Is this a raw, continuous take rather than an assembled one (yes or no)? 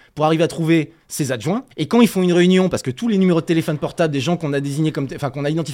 no